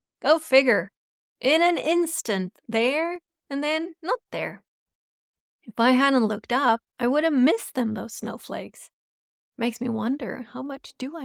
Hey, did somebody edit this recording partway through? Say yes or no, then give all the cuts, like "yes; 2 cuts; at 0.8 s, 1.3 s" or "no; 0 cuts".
no; 0 cuts